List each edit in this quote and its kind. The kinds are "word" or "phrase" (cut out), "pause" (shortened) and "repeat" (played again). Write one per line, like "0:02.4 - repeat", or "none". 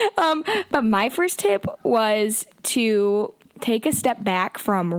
none